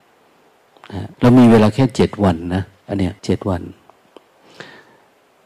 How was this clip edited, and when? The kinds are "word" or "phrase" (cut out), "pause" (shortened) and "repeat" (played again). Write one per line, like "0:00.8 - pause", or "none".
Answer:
0:01.1 - pause
0:03.2 - pause

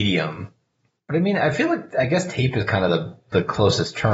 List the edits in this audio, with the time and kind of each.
none

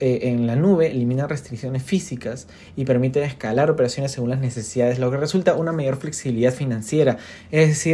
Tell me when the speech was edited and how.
none

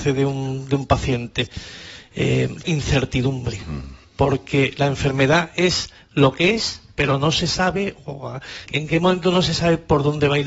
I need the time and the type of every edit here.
0:02.6 - phrase
0:04.0 - pause
0:08.7 - word

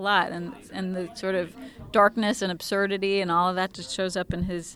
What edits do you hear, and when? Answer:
none

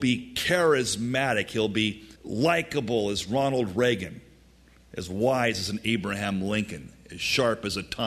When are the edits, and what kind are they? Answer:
0:02.2 - pause

